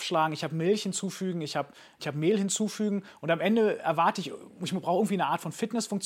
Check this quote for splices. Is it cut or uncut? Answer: uncut